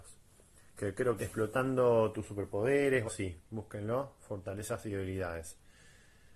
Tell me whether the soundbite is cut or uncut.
cut